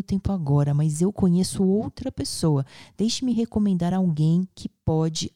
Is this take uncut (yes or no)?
yes